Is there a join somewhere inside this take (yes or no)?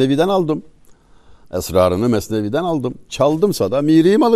no